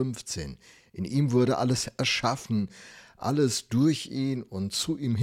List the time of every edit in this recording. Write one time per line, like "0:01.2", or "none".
none